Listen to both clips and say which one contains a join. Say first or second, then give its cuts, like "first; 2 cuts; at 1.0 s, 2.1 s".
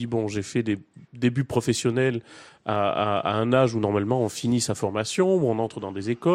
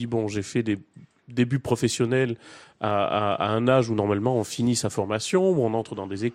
first; 1 cut; at 1.0 s